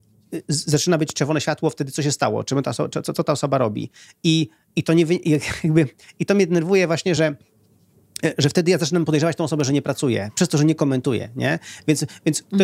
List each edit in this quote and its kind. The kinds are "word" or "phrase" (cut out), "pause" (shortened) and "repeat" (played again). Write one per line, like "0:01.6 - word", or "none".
none